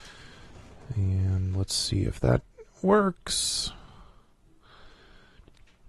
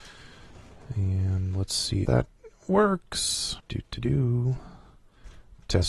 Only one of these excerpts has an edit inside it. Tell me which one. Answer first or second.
second